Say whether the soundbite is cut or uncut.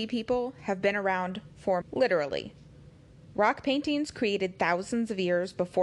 cut